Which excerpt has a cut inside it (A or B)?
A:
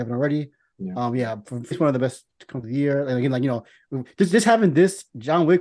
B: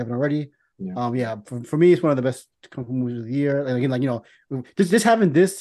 A